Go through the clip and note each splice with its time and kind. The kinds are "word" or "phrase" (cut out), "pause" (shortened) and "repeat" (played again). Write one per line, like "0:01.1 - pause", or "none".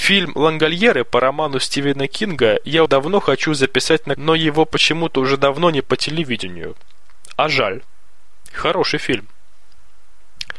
0:02.9 - word
0:04.2 - word
0:05.8 - word